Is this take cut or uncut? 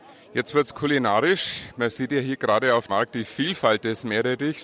cut